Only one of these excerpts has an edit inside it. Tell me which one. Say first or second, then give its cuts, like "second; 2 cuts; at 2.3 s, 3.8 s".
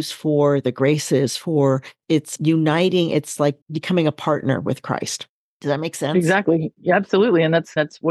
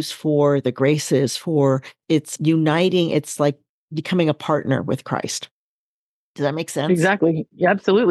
first; 2 cuts; at 3.6 s, 5.4 s